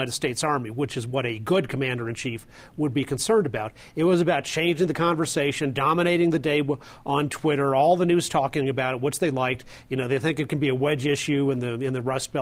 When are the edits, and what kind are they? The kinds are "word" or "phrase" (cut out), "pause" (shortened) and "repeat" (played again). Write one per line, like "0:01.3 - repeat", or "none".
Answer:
none